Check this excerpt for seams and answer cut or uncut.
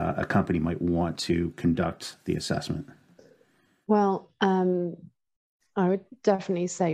uncut